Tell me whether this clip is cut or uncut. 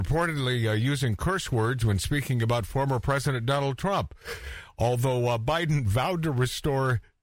uncut